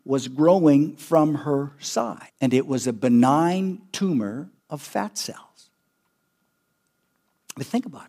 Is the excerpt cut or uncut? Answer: cut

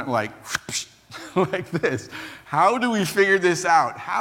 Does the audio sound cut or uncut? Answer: uncut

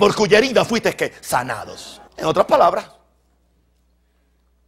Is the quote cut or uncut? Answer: cut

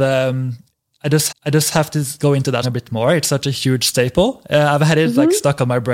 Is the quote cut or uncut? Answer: cut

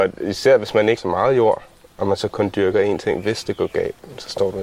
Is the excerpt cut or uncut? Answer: cut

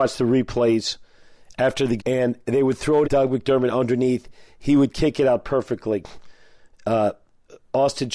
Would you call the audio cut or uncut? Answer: cut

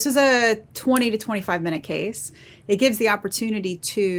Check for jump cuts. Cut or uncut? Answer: uncut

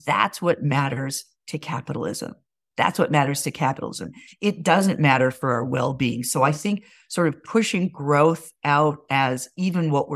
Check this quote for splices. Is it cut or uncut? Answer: uncut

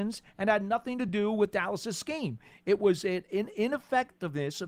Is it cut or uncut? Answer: uncut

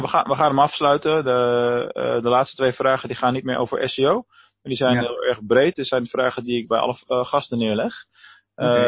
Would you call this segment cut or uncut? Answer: uncut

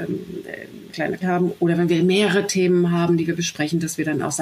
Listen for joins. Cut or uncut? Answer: cut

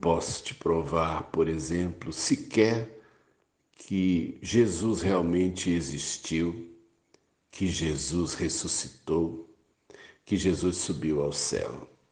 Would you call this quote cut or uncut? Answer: uncut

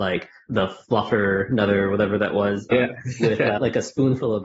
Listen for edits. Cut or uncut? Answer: uncut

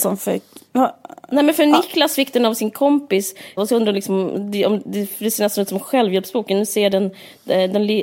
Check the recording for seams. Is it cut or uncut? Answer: cut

